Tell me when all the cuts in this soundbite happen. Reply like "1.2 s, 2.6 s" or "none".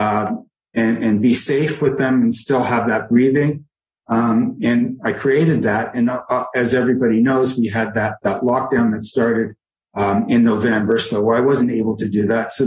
none